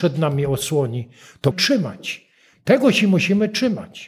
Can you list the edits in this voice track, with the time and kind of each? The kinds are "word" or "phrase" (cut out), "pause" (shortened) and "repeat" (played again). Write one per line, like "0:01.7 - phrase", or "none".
0:01.5 - word